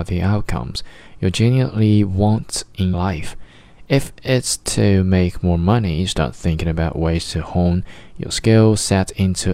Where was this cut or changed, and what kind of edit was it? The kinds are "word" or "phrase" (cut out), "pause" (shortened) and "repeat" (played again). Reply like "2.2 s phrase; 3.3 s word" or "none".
2.9 s word